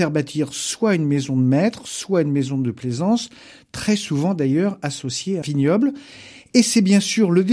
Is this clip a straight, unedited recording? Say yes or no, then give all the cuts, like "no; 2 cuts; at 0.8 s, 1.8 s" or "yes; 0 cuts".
no; 1 cut; at 5.4 s